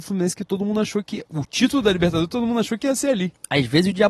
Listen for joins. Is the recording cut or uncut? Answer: uncut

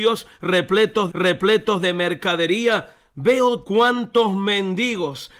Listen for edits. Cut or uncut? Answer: cut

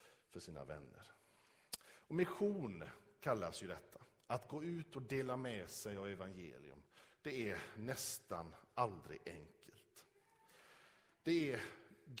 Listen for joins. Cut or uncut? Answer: uncut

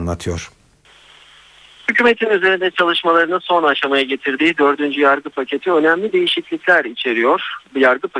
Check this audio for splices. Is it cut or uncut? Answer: uncut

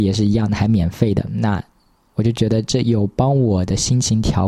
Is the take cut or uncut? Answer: uncut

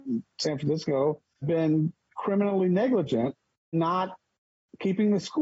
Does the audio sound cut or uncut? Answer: cut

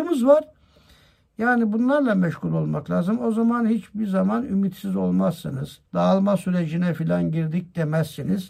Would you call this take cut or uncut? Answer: cut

